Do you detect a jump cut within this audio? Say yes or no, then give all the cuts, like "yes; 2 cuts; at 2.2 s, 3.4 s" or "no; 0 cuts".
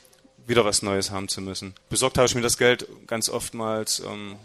yes; 1 cut; at 1.8 s